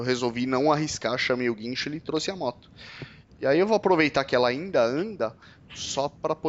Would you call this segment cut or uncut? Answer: uncut